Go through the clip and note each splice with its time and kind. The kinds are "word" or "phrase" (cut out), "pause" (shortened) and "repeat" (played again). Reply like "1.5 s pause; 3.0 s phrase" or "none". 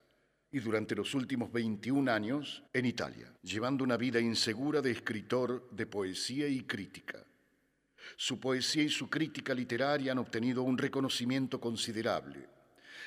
2.7 s pause; 3.4 s pause